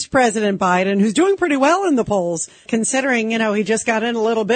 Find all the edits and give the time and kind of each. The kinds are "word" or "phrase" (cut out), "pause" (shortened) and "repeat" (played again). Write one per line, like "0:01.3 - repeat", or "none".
0:02.7 - word